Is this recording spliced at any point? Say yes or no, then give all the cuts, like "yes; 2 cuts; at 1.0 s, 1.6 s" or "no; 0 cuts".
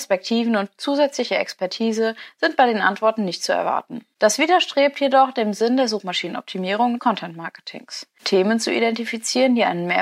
yes; 1 cut; at 7.0 s